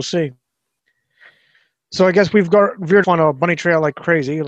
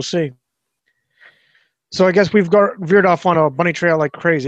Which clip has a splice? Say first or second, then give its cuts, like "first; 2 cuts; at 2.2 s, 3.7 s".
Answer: first; 1 cut; at 3.0 s